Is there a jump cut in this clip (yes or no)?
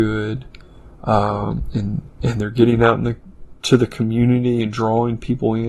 no